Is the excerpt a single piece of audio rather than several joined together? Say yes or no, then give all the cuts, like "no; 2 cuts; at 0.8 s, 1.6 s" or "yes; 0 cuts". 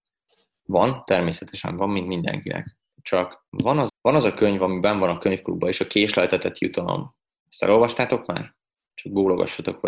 no; 2 cuts; at 3.5 s, 3.9 s